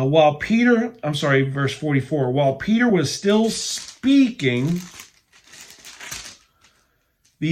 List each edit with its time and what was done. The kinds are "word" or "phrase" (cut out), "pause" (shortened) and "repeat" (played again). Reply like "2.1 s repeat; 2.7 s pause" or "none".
none